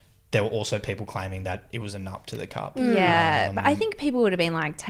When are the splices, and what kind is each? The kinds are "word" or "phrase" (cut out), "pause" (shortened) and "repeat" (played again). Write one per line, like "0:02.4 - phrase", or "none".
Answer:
none